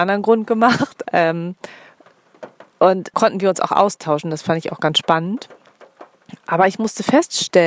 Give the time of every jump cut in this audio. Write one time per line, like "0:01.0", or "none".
0:01.0
0:03.1

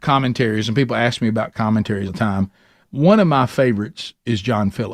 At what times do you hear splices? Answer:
0:02.1
0:02.9

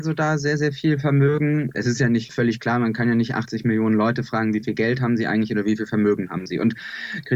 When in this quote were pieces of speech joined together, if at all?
none

